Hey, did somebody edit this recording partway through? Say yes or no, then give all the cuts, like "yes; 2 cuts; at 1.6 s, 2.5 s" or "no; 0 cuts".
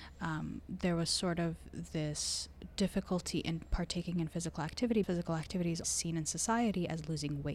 yes; 2 cuts; at 5.0 s, 5.8 s